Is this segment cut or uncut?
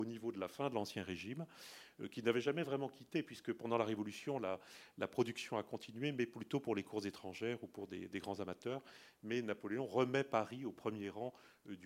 uncut